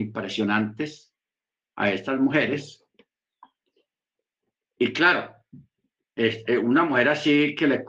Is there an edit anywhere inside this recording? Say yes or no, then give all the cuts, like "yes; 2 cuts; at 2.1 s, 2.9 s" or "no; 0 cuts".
no; 0 cuts